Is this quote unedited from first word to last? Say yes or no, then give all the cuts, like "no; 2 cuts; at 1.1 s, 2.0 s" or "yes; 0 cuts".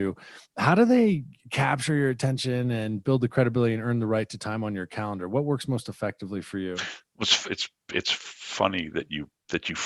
yes; 0 cuts